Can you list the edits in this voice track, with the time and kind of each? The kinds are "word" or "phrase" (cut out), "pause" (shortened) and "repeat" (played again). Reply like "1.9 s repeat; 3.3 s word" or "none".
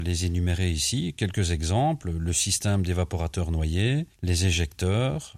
none